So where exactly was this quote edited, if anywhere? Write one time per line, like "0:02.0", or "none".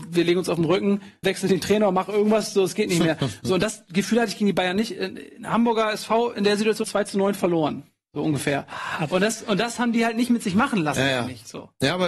0:01.2
0:06.8

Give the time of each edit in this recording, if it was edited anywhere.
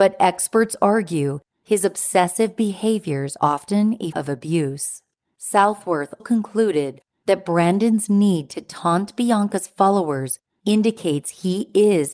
0:03.4
0:04.1
0:06.2

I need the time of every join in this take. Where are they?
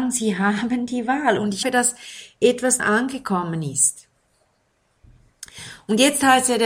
0:01.6
0:02.8

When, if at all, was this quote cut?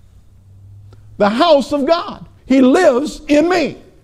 0:02.4

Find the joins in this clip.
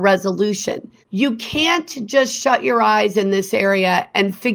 0:01.0

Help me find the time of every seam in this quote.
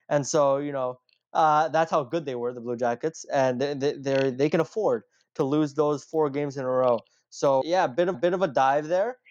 0:07.6
0:08.1

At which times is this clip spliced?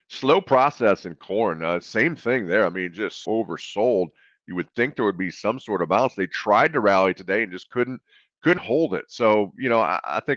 0:03.2
0:08.6

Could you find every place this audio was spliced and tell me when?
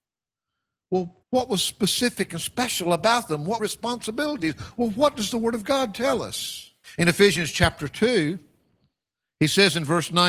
0:01.2
0:03.6
0:06.8

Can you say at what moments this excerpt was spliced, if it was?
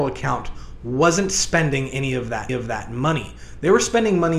0:02.5

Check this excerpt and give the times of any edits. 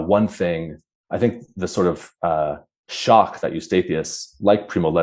none

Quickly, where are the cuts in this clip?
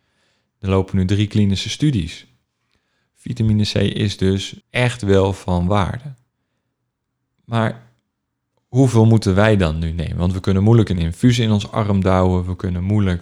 0:04.6
0:06.4

